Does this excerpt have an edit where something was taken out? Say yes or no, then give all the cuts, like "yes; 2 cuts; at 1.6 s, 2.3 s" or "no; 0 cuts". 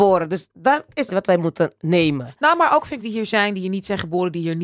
yes; 2 cuts; at 1.1 s, 3.0 s